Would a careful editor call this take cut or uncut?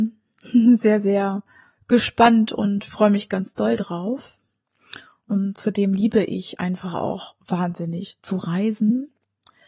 uncut